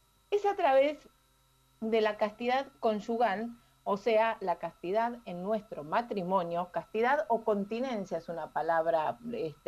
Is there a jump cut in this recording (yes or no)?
no